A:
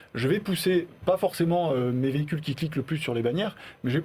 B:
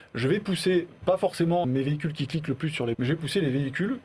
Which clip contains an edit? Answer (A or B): B